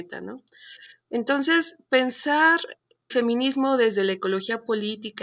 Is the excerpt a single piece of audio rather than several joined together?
no; 1 cut; at 3.1 s

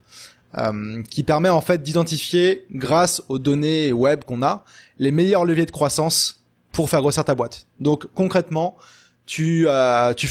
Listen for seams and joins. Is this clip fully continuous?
yes; 0 cuts

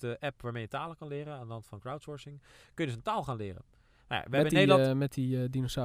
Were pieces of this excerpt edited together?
no; 0 cuts

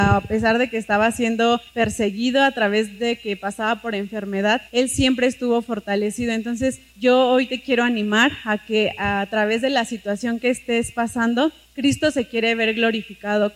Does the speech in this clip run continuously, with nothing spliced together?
no; 4 cuts; at 1.7 s, 4.7 s, 6.9 s, 11.6 s

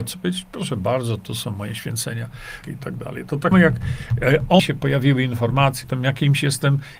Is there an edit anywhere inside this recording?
yes; 4 cuts; at 2.6 s, 3.5 s, 4.6 s, 5.8 s

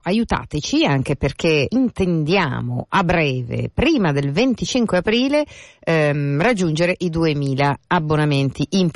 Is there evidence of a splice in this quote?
yes; 1 cut; at 1.7 s

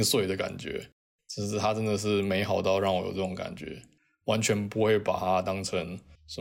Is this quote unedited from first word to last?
yes; 0 cuts

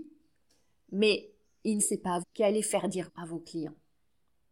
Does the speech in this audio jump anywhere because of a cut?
yes; 3 cuts; at 1.8 s, 2.2 s, 3.1 s

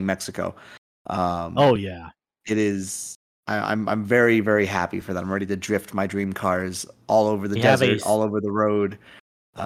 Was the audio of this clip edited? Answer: no; 0 cuts

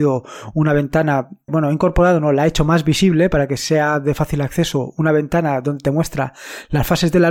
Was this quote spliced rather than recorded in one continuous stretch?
yes; 1 cut; at 1.5 s

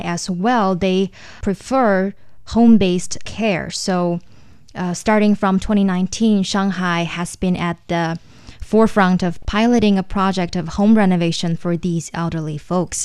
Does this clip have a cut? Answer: no; 0 cuts

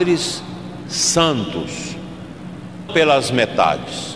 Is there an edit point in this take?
yes; 1 cut; at 2.9 s

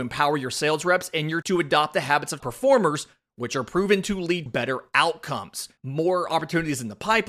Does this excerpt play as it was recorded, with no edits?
no; 4 cuts; at 1.4 s, 2.4 s, 4.5 s, 5.8 s

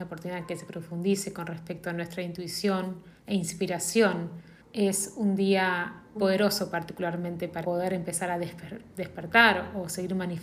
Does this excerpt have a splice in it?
yes; 4 cuts; at 3.2 s, 4.6 s, 6.2 s, 7.6 s

